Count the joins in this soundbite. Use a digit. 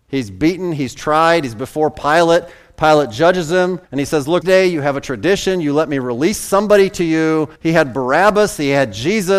3